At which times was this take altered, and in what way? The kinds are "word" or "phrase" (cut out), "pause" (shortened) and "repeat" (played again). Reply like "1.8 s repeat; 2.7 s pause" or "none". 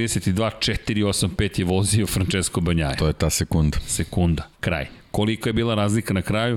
4.5 s pause